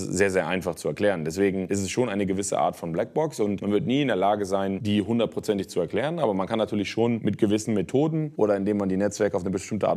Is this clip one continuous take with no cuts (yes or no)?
yes